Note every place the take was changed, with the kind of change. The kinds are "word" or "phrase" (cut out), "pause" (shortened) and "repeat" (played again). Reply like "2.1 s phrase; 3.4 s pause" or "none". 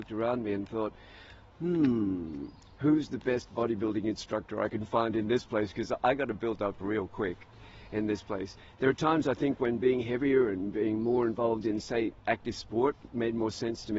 none